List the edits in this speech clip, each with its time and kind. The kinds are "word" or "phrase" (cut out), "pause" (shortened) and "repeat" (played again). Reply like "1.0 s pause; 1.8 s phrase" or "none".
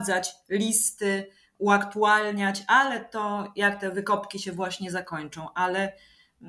none